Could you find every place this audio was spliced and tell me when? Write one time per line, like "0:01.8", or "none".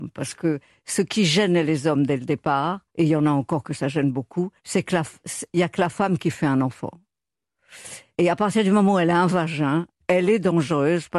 0:02.9
0:04.6